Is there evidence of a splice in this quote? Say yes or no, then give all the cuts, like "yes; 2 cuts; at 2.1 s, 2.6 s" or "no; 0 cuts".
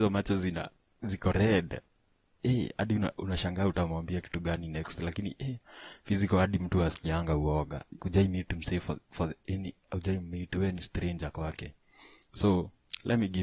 yes; 1 cut; at 8.0 s